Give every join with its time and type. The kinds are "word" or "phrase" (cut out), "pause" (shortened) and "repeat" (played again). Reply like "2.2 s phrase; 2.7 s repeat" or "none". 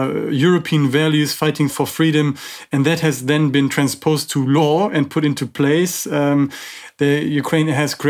1.7 s word